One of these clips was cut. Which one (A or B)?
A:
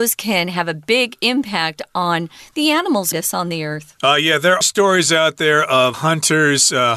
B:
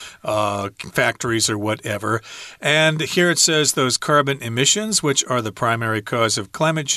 A